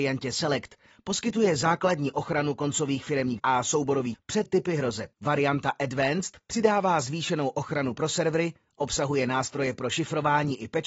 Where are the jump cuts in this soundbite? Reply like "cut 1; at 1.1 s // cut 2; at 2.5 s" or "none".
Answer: cut 1; at 3.4 s // cut 2; at 4.1 s // cut 3; at 4.5 s // cut 4; at 5.1 s